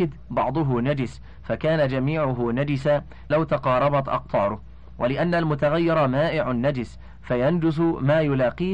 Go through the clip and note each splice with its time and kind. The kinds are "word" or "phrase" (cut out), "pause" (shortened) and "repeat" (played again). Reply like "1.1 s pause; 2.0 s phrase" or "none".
3.3 s word

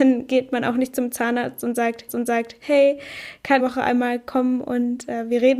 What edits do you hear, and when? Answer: 2.1 s repeat; 3.6 s phrase

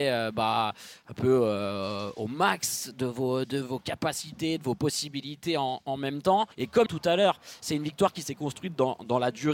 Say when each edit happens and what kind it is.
6.5 s pause; 6.9 s phrase

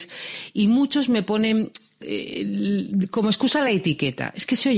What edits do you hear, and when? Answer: none

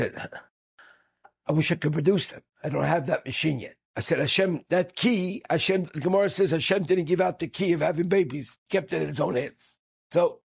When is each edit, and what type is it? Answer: 2.5 s pause; 3.8 s pause; 8.6 s pause

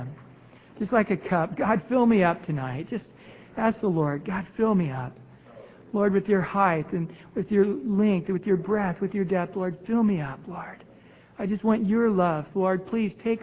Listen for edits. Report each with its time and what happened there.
none

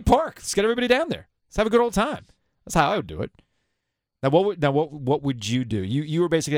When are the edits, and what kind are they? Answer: none

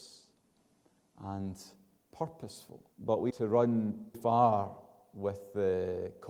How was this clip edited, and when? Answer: 2.9 s pause; 3.3 s phrase; 4.1 s word

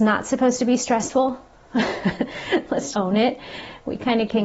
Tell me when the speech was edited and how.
2.9 s word

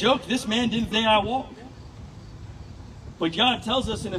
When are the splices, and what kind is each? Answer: 0.9 s phrase

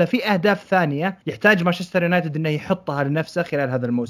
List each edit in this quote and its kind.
1.2 s pause

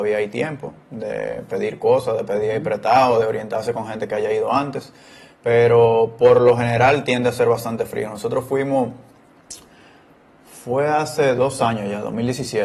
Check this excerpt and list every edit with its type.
none

